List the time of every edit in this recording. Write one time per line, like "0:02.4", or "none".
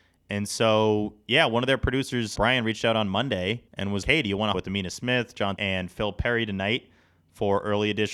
0:02.4
0:03.7
0:04.0
0:04.5
0:05.6